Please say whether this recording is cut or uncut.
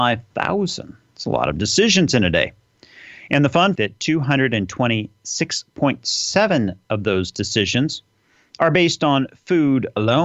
cut